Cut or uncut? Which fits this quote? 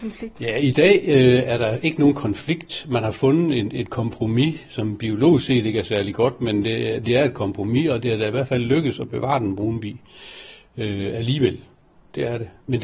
uncut